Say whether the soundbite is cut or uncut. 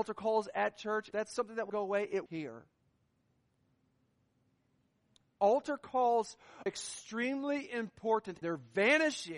cut